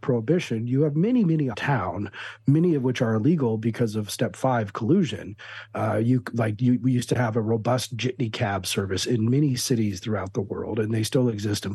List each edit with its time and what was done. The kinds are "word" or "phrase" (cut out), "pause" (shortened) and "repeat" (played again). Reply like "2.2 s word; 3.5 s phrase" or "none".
1.5 s phrase